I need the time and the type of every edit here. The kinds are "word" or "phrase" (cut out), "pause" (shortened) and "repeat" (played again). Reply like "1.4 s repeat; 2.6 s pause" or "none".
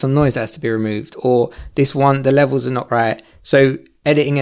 2.9 s word